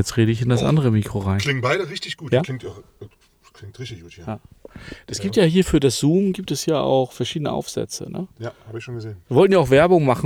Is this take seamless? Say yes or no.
yes